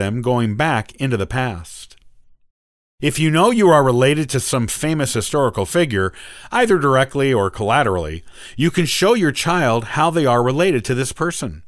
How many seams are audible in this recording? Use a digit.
0